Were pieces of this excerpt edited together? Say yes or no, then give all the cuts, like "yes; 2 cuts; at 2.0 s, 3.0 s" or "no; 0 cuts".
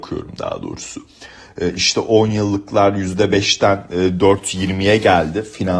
no; 0 cuts